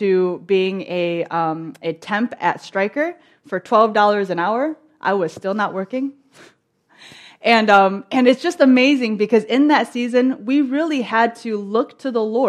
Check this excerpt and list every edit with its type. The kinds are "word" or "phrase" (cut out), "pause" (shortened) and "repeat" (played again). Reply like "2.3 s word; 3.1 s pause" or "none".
none